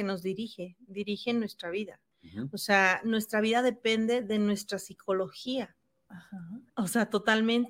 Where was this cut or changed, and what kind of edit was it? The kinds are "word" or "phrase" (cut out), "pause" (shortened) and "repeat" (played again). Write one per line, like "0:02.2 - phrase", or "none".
0:02.1 - pause
0:06.7 - pause